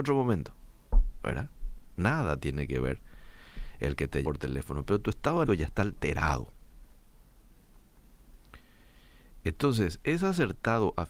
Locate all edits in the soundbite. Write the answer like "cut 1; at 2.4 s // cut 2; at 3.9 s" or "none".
cut 1; at 4.2 s // cut 2; at 5.4 s